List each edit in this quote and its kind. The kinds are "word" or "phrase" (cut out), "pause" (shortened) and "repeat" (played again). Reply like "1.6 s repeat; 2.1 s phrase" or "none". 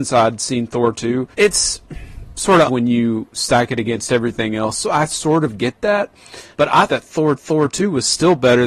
1.3 s pause; 2.7 s word; 6.5 s pause; 6.9 s word; 7.4 s repeat

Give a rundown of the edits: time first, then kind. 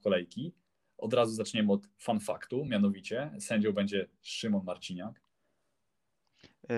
none

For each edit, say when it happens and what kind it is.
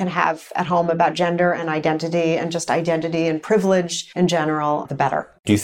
4.1 s pause

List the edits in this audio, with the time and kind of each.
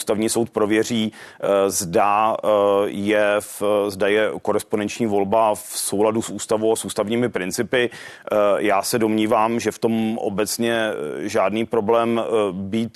none

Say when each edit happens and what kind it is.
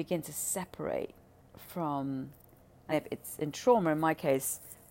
1.4 s pause; 2.9 s word

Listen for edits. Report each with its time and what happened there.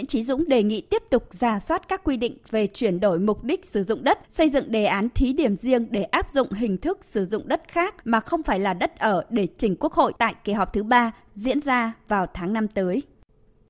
4.2 s pause; 8.0 s pause; 10.2 s pause

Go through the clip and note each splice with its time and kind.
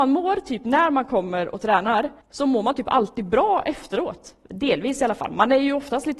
2.2 s pause

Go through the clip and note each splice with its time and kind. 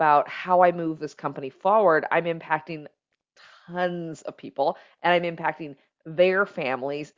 none

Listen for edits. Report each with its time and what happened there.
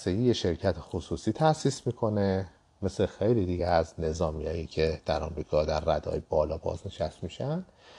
none

